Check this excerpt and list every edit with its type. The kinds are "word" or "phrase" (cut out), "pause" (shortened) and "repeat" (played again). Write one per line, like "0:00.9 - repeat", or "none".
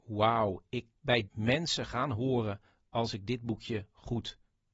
0:00.9 - word
0:01.3 - word